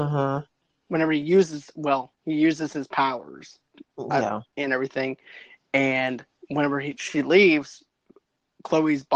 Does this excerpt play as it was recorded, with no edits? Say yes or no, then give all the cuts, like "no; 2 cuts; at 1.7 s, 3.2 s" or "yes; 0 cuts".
yes; 0 cuts